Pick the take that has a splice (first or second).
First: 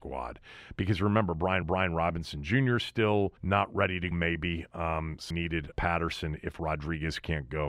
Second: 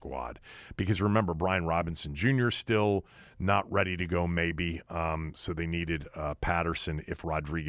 first